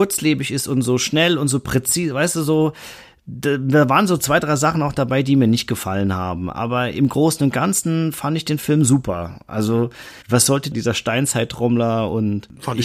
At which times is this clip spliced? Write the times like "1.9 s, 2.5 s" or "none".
10.2 s